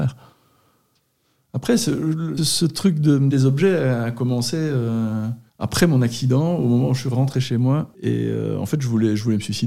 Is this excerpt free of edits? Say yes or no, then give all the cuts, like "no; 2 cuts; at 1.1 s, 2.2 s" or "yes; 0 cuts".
no; 4 cuts; at 2.4 s, 3.3 s, 5.5 s, 7.9 s